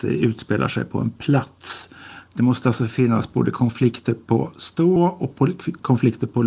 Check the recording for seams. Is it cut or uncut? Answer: cut